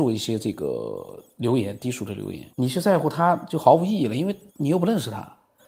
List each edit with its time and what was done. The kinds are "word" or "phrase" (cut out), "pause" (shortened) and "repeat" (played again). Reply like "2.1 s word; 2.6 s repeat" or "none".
2.5 s pause; 4.5 s pause